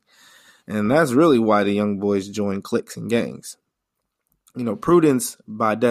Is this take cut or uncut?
uncut